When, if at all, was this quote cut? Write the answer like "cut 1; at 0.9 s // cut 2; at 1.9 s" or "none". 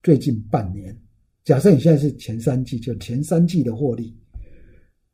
none